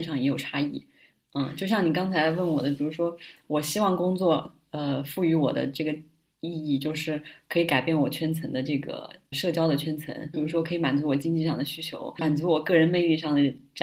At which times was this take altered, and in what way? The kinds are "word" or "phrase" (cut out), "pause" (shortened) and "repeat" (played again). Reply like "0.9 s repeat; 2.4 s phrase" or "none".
9.3 s word; 10.3 s word; 12.2 s word